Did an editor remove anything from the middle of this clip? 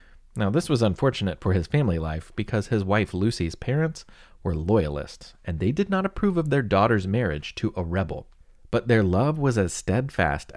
no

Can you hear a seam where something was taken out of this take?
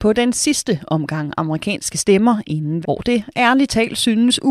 yes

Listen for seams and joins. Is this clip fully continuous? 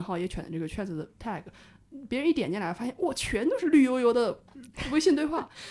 yes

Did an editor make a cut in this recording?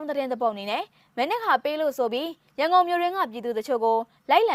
no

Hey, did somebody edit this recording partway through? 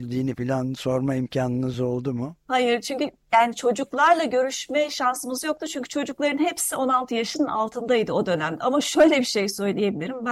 no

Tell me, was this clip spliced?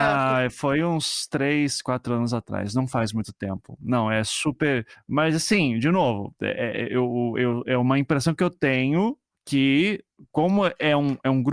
no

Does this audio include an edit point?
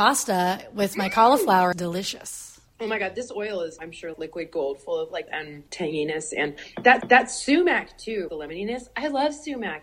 yes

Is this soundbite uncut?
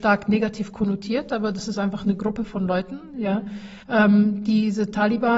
no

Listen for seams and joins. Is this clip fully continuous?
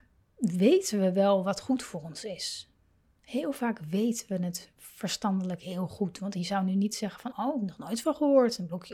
no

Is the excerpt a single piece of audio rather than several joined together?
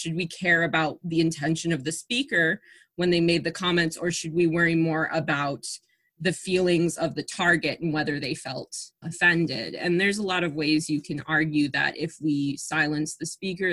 no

